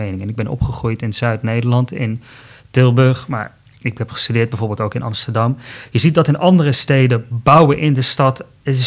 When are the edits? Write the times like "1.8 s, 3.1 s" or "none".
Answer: none